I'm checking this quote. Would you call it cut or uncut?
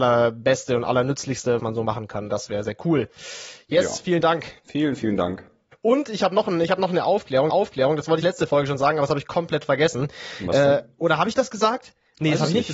cut